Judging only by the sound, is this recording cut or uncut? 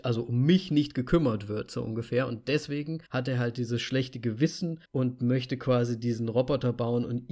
cut